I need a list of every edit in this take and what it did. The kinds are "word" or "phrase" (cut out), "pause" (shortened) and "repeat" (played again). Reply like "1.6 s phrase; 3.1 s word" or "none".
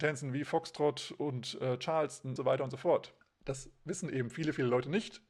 2.4 s phrase; 3.2 s pause